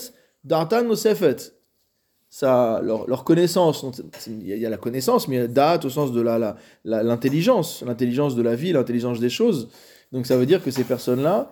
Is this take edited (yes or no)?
no